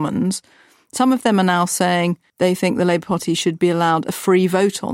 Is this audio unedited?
yes; 0 cuts

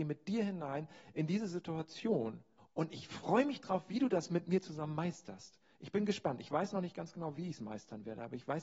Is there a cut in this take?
yes; 1 cut; at 2.6 s

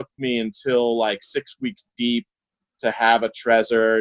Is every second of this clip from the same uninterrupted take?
yes; 0 cuts

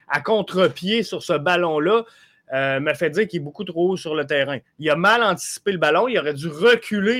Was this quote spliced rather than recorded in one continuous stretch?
no; 0 cuts

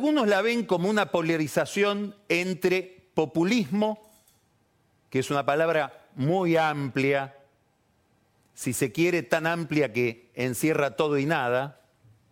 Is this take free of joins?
yes; 0 cuts

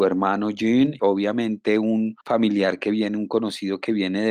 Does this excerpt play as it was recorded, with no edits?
no; 2 cuts; at 1.0 s, 2.2 s

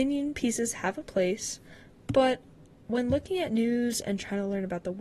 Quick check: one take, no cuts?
yes; 0 cuts

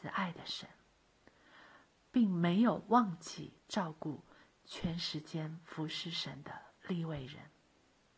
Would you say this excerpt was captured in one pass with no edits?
yes; 0 cuts

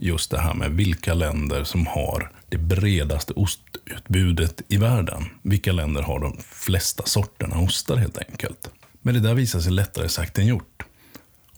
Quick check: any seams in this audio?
yes; 1 cut; at 5.4 s

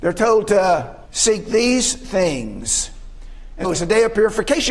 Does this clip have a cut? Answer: yes; 2 cuts; at 1.0 s, 3.6 s

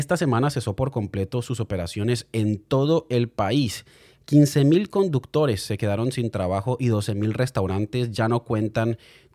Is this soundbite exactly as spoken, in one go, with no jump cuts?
yes; 0 cuts

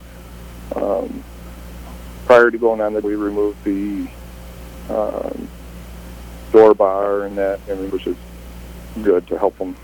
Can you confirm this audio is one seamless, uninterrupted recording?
no; 3 cuts; at 3.0 s, 7.3 s, 7.9 s

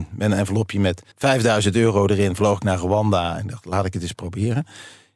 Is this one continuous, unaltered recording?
no; 1 cut; at 1.1 s

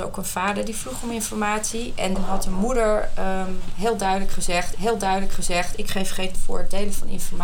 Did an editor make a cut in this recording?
yes; 3 cuts; at 2.1 s, 4.7 s, 6.3 s

